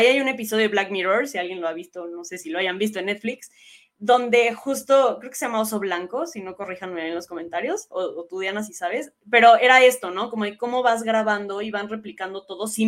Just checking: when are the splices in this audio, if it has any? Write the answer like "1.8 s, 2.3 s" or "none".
none